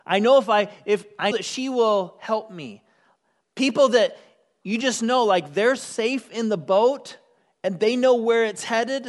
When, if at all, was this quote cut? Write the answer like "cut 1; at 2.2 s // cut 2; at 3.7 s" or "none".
cut 1; at 1.3 s